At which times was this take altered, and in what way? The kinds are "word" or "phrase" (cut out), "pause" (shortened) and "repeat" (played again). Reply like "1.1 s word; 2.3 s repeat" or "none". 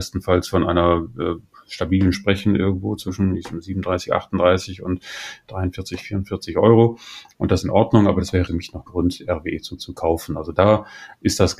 2.1 s word; 7.6 s word; 8.5 s word; 8.9 s word; 9.8 s repeat

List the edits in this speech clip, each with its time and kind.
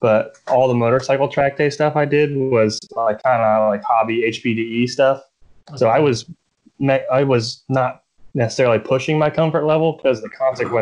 none

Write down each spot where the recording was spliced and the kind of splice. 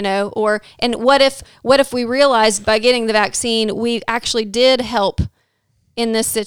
none

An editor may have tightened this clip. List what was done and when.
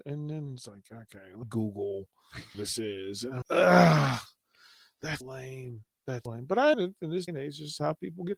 1.4 s word; 2.5 s word; 3.4 s word; 5.2 s word; 6.3 s word; 6.7 s word; 7.3 s word

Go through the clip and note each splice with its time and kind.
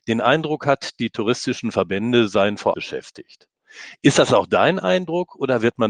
2.7 s phrase

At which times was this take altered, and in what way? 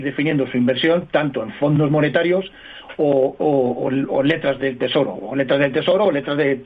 none

